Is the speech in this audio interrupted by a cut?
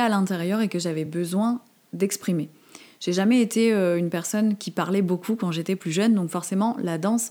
no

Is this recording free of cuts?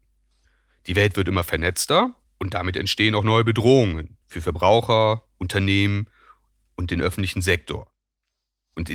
no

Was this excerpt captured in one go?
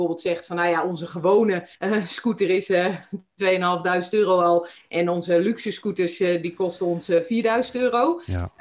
no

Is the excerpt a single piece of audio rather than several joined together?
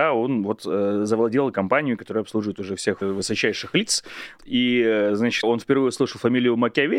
no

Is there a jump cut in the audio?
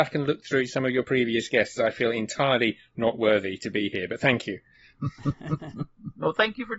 no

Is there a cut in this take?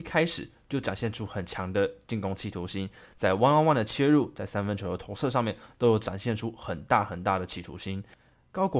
no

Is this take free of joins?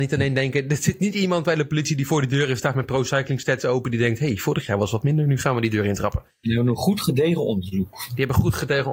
yes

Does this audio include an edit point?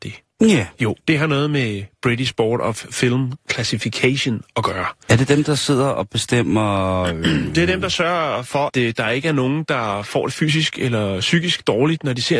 yes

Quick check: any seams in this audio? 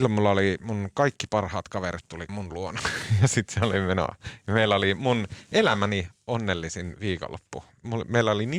yes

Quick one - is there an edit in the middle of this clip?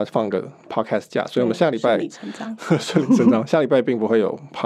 no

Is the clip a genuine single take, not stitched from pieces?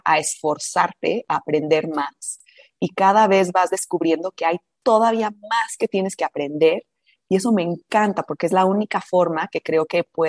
yes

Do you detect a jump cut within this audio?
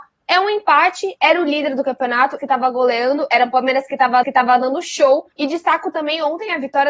yes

